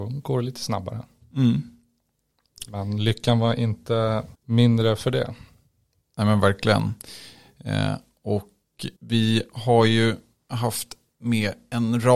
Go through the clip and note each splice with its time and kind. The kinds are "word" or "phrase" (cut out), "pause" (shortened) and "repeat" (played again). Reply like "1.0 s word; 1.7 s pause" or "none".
4.3 s pause; 9.0 s pause